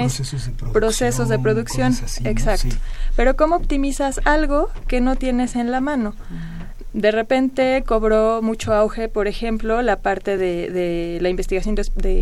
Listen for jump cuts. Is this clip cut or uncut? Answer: uncut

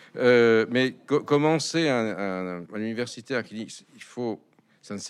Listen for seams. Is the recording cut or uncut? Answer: cut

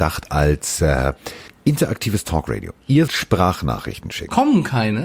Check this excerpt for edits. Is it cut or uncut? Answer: cut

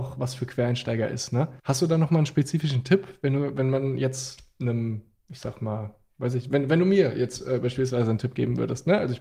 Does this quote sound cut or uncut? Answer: cut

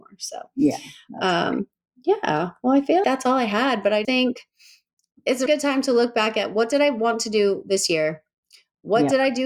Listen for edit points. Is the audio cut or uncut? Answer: cut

